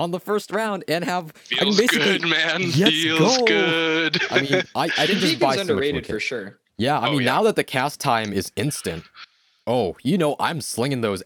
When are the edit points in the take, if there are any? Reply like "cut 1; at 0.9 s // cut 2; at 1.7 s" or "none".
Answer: none